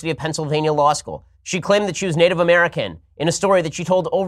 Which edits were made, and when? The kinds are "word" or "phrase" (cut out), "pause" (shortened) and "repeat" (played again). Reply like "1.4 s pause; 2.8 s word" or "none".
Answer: 1.3 s pause